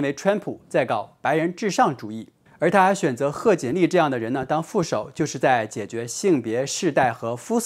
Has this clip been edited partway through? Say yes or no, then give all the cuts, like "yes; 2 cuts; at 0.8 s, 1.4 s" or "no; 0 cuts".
yes; 1 cut; at 2.5 s